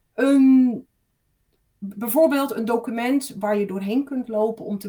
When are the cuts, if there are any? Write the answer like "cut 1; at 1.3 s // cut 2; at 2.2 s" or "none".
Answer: none